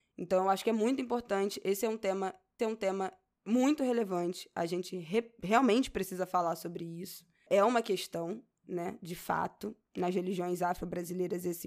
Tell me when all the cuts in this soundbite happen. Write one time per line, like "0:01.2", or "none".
0:02.6